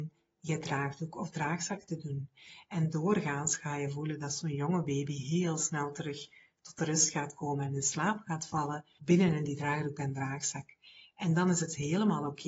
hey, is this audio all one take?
yes; 0 cuts

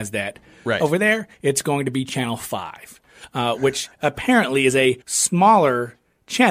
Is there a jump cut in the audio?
yes; 1 cut; at 5.0 s

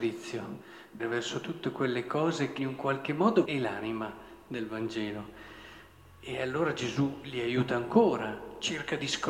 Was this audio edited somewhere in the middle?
yes; 3 cuts; at 1.0 s, 2.6 s, 3.4 s

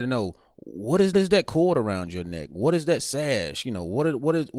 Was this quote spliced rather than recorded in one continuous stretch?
yes; 1 cut; at 1.1 s

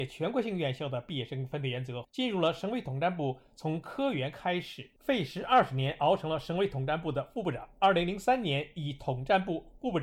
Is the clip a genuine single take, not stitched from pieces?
no; 1 cut; at 2.0 s

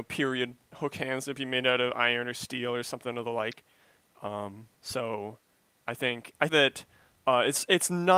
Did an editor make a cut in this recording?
yes; 2 cuts; at 4.7 s, 6.5 s

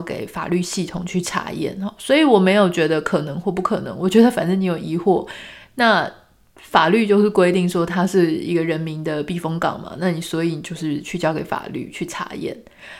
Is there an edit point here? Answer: no; 0 cuts

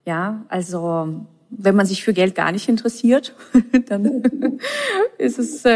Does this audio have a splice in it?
no; 0 cuts

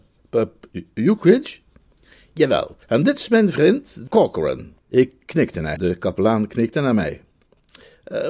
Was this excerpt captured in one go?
no; 4 cuts; at 2.8 s, 4.1 s, 4.8 s, 5.8 s

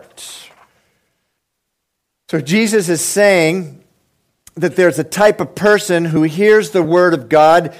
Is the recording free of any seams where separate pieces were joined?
yes; 0 cuts

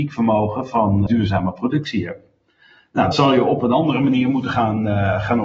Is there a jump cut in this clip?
yes; 2 cuts; at 1.1 s, 3.1 s

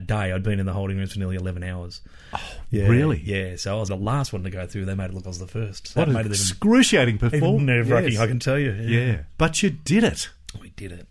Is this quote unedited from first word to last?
no; 4 cuts; at 3.9 s, 5.2 s, 6.0 s, 7.6 s

